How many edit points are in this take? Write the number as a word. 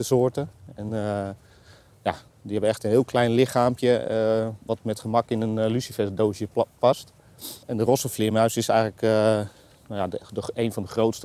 two